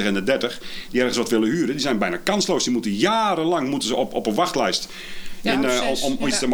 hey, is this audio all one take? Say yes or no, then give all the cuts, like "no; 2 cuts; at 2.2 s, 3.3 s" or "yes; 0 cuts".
yes; 0 cuts